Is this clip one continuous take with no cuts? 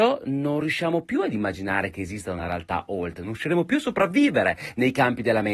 yes; 0 cuts

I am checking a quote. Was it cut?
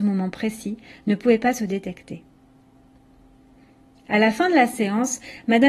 no; 0 cuts

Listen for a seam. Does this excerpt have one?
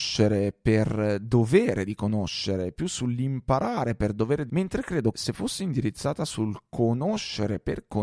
yes; 2 cuts; at 4.5 s, 5.1 s

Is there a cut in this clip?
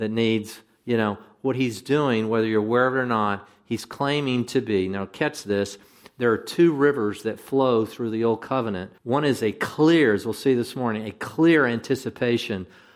yes; 1 cut; at 9.0 s

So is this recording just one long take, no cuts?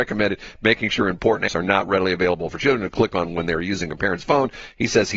no; 1 cut; at 1.5 s

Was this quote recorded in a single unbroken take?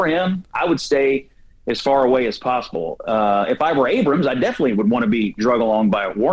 yes; 0 cuts

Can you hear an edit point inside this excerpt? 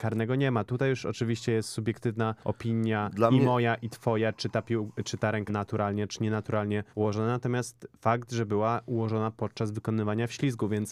yes; 3 cuts; at 2.4 s, 5.5 s, 6.9 s

